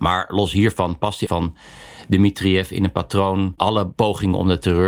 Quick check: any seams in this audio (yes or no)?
yes